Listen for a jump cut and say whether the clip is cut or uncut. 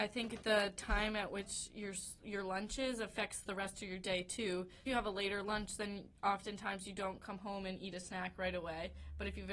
cut